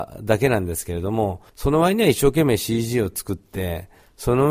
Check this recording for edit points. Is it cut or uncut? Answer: cut